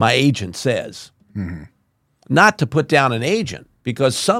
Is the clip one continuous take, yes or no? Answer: yes